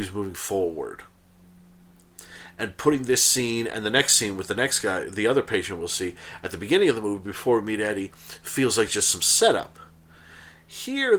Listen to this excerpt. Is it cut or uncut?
uncut